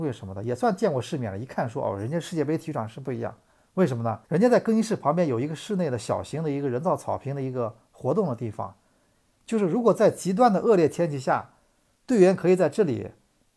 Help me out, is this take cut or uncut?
cut